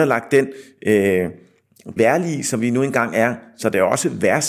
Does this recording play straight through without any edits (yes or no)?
no